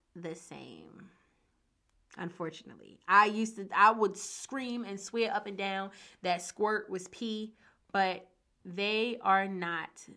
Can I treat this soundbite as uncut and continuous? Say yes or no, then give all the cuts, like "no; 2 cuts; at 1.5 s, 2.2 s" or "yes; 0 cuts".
yes; 0 cuts